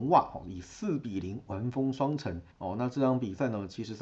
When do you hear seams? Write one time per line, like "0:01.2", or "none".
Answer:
0:02.5